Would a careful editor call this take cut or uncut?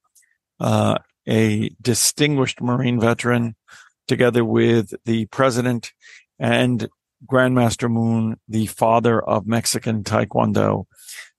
uncut